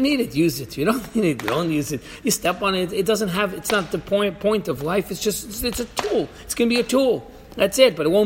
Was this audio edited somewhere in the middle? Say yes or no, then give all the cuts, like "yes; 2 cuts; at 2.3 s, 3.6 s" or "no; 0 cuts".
no; 0 cuts